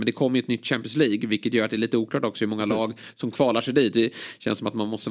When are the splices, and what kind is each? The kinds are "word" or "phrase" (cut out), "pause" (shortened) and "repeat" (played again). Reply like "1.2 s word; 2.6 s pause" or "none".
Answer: none